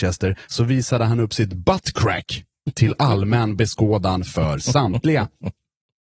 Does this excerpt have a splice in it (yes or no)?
no